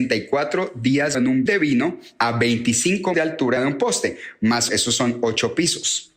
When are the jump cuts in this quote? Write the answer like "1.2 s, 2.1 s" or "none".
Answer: 1.1 s, 1.5 s, 3.1 s, 3.6 s, 4.7 s